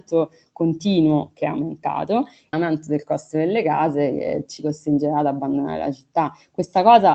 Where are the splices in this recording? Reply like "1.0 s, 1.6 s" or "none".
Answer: 2.5 s